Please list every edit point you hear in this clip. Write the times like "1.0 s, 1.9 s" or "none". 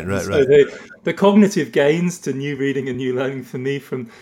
none